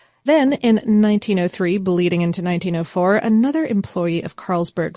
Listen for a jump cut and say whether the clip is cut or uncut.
uncut